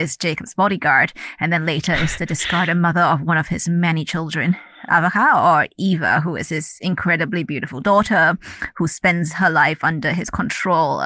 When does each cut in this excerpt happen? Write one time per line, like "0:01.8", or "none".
0:04.9